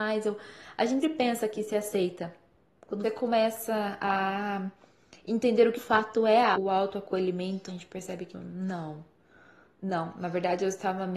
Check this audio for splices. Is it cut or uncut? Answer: cut